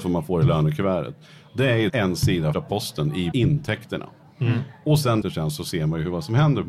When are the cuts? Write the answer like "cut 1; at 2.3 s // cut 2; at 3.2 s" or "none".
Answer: cut 1; at 1.9 s // cut 2; at 2.5 s // cut 3; at 3.3 s // cut 4; at 5.2 s